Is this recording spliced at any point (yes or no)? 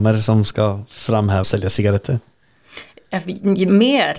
yes